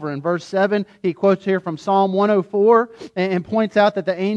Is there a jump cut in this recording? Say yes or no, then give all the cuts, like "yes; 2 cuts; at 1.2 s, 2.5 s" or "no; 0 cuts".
no; 0 cuts